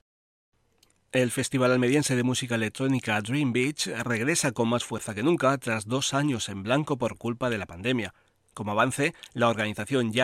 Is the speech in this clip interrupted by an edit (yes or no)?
no